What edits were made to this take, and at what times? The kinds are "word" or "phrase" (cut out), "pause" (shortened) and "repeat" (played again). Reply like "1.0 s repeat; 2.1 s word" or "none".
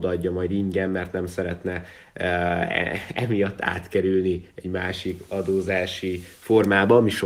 none